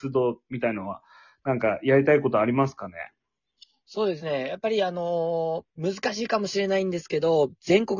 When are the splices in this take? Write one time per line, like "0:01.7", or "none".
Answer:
0:05.7